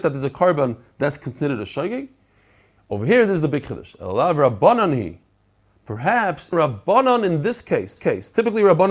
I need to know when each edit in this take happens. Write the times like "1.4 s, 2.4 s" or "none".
6.5 s, 8.0 s